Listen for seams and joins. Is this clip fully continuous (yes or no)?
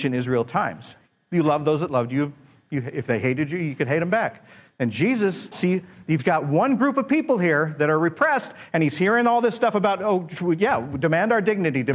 no